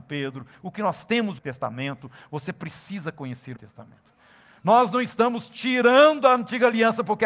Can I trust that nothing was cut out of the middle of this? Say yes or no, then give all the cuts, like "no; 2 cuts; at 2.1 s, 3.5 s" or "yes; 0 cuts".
no; 2 cuts; at 1.4 s, 3.6 s